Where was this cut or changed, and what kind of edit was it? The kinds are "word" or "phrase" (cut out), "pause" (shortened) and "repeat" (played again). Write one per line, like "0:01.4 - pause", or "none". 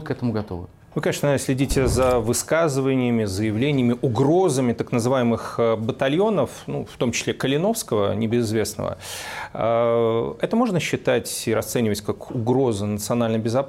none